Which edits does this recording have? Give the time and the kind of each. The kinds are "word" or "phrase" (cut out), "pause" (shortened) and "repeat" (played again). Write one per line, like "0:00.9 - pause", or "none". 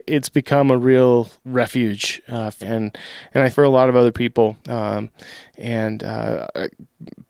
0:01.4 - pause
0:02.6 - word
0:03.5 - word
0:04.6 - pause